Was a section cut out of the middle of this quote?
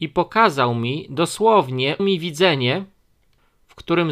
yes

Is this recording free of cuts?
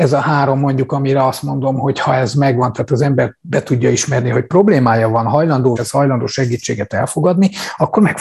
no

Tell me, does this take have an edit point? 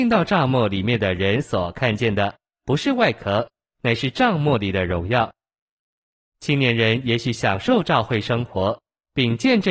no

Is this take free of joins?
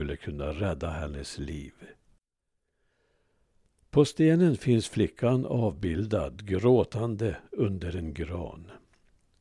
yes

